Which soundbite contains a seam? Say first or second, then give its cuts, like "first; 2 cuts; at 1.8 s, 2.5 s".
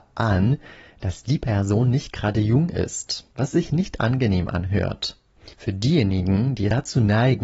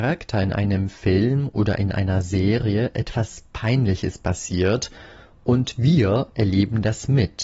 first; 2 cuts; at 3.3 s, 5.5 s